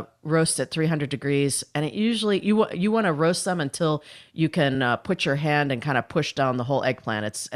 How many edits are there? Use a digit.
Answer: 0